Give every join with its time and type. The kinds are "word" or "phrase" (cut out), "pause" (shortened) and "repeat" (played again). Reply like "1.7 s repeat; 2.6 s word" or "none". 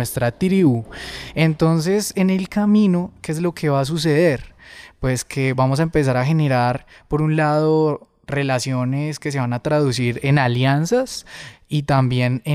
none